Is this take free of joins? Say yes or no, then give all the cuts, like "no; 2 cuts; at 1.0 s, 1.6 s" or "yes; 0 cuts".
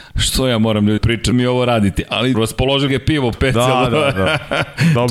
no; 5 cuts; at 1.0 s, 1.3 s, 2.3 s, 2.9 s, 3.3 s